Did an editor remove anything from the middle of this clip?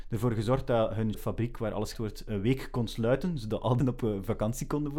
yes; 3 cuts; at 1.1 s, 1.9 s, 3.8 s

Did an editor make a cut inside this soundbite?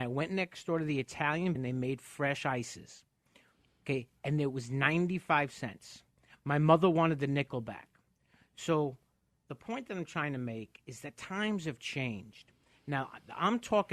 yes; 1 cut; at 1.6 s

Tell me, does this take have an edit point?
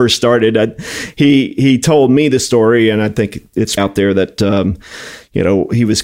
yes; 1 cut; at 3.8 s

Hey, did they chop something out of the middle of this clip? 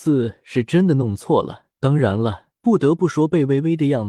yes; 2 cuts; at 1.7 s, 2.5 s

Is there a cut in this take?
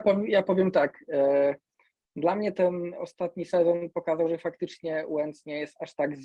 no; 0 cuts

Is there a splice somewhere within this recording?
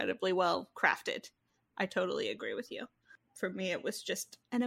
no; 0 cuts

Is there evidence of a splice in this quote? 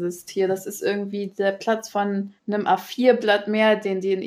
yes; 1 cut; at 2.4 s

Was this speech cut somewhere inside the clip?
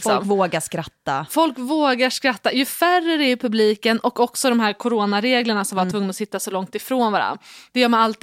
yes; 1 cut; at 5.9 s

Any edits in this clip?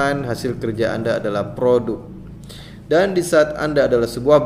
no; 0 cuts

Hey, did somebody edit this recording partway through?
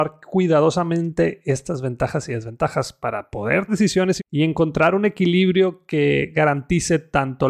yes; 2 cuts; at 3.7 s, 4.2 s

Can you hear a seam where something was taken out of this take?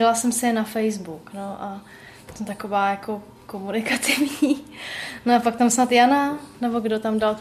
no; 0 cuts

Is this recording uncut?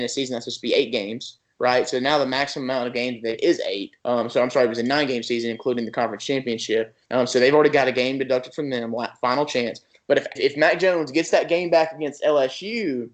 no; 4 cuts; at 3.4 s, 4.0 s, 7.0 s, 10.4 s

